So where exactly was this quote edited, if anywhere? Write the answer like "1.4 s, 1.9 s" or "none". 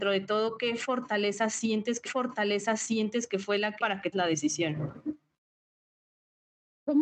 2.1 s, 3.8 s, 4.1 s